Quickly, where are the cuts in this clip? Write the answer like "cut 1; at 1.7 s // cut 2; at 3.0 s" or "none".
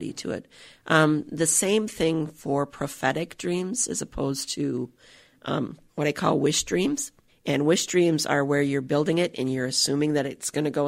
cut 1; at 5.9 s // cut 2; at 7.3 s